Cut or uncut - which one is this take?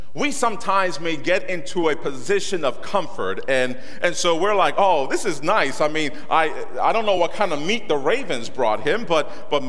uncut